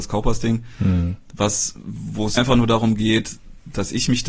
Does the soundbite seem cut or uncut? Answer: cut